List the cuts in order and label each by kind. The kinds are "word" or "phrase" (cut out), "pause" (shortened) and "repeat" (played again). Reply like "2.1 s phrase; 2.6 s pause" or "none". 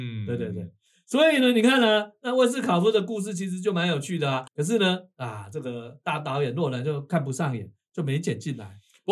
4.5 s pause